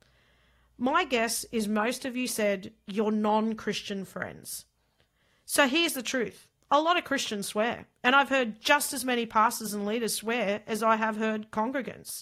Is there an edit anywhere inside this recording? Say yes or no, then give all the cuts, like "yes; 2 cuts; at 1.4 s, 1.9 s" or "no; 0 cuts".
no; 0 cuts